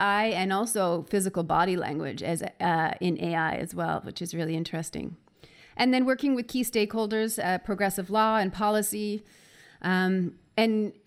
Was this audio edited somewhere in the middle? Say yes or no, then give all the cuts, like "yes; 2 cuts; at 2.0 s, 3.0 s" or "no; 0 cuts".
no; 0 cuts